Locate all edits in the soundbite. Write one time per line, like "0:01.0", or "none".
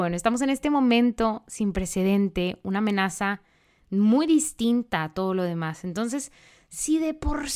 none